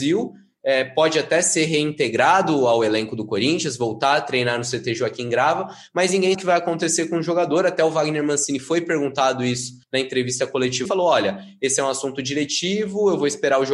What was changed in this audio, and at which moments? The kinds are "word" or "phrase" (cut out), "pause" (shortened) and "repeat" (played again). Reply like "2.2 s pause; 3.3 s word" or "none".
6.3 s word; 9.8 s pause; 10.9 s phrase

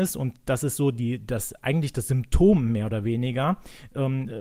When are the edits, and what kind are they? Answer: none

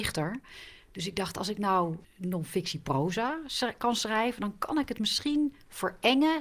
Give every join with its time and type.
2.0 s word

